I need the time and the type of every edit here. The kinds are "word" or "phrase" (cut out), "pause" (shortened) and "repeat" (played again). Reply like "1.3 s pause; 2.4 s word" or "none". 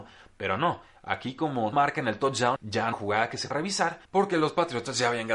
1.7 s word; 2.6 s word; 2.9 s phrase; 3.5 s word; 4.0 s pause